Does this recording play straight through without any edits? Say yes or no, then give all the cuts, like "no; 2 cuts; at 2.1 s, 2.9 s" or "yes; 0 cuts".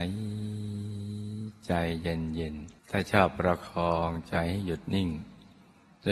no; 1 cut; at 2.8 s